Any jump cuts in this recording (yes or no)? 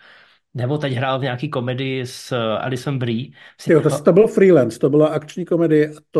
no